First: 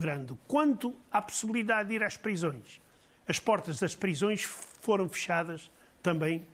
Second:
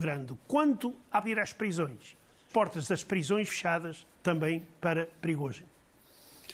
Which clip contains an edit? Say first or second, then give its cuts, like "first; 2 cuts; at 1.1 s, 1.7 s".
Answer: second; 4 cuts; at 1.2 s, 2.5 s, 3.5 s, 4.1 s